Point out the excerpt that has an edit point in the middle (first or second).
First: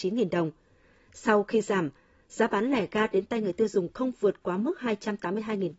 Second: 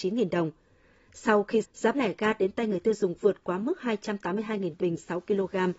second